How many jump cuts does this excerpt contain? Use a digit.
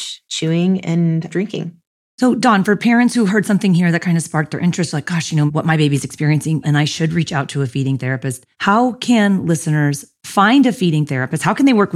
4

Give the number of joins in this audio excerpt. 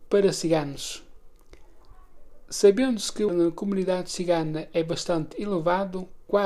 1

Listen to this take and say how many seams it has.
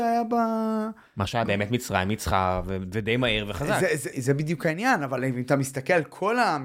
2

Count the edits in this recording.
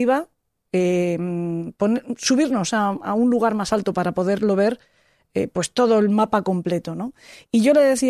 0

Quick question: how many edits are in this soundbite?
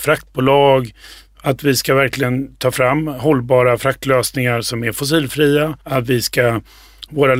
1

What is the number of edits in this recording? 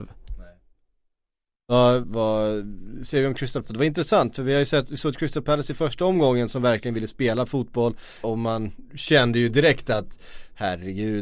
3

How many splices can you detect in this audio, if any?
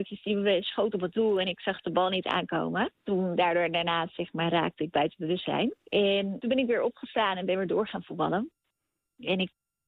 0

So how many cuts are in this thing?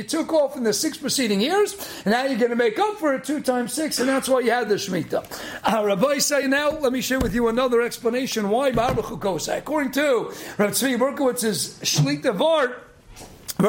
0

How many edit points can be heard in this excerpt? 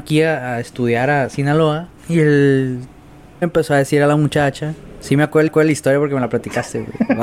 3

